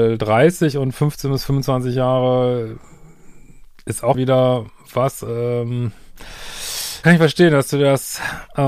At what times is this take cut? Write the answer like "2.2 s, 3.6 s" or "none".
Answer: 4.1 s, 5.2 s, 7.0 s